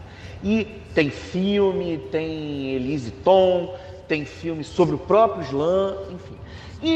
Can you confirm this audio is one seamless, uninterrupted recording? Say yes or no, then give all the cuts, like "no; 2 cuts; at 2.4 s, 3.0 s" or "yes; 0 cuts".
yes; 0 cuts